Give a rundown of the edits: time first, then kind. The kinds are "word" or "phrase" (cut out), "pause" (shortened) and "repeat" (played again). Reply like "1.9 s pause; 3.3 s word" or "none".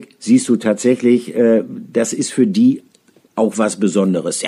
none